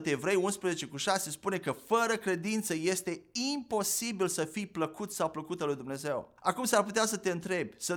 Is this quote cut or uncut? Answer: cut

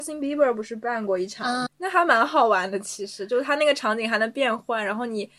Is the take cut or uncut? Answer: cut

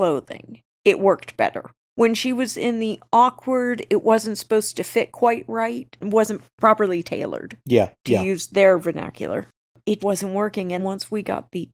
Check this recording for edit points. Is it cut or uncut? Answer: cut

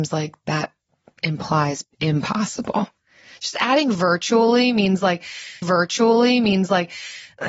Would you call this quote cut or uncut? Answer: cut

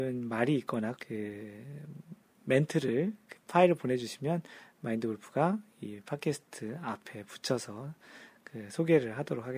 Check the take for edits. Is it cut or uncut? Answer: cut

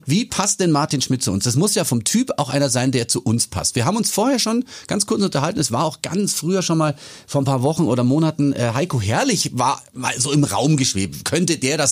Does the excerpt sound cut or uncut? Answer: uncut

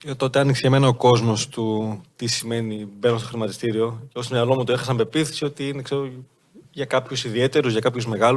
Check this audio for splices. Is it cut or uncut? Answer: uncut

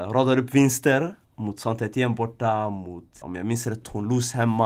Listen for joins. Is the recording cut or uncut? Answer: cut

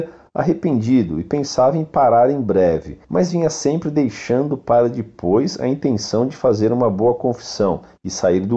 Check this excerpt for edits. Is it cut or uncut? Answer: cut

